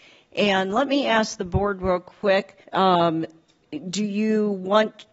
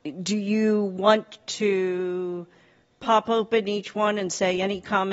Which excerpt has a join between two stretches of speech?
first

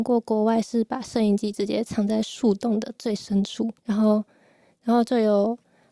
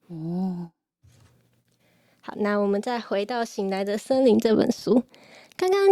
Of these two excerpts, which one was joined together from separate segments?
first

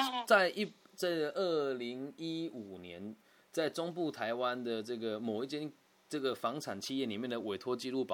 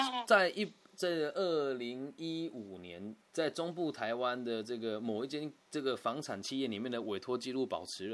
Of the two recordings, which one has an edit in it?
second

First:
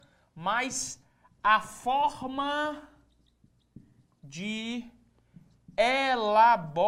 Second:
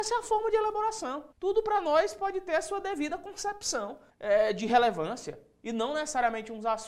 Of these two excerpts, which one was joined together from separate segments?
second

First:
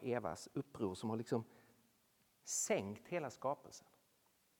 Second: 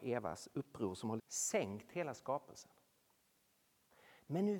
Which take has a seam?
second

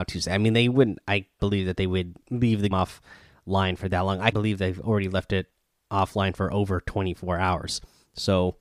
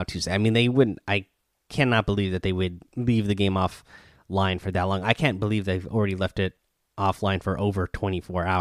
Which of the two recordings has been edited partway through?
first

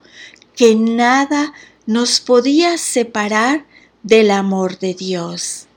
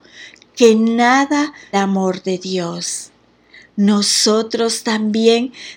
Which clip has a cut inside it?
second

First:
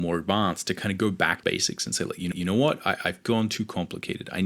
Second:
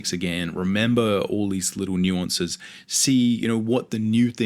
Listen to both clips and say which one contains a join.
first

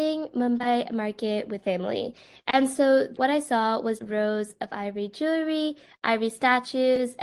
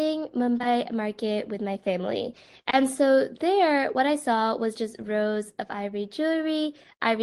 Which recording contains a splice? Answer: first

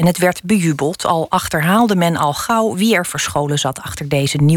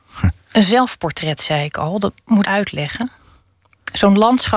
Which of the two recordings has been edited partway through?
second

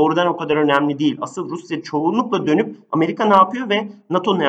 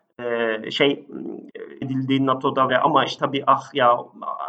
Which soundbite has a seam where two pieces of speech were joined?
second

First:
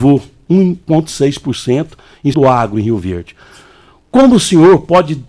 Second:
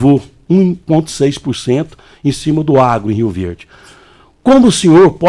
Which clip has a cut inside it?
first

